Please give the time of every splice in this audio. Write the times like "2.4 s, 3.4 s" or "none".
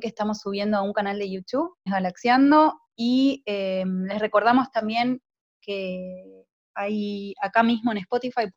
1.9 s